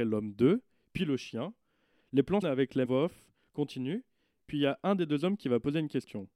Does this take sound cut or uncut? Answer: cut